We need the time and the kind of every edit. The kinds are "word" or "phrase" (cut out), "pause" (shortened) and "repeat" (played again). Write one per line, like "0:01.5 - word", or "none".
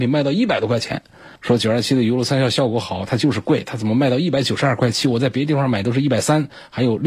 0:01.4 - pause